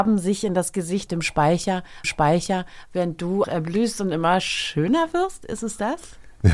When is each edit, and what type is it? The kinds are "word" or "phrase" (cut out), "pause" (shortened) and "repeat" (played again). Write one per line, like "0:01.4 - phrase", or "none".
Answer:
0:01.1 - phrase
0:02.0 - repeat
0:03.4 - word